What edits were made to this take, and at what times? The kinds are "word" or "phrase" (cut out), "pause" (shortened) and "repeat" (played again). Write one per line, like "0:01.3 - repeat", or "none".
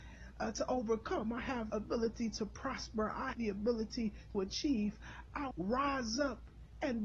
0:01.7 - word
0:03.3 - word
0:04.3 - word
0:05.5 - word